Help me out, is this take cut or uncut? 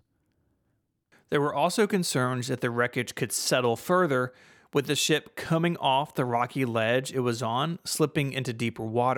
uncut